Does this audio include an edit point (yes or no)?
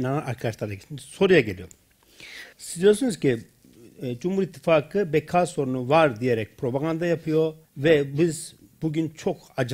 yes